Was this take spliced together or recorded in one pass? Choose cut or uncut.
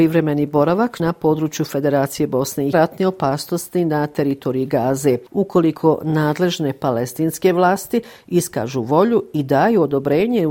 cut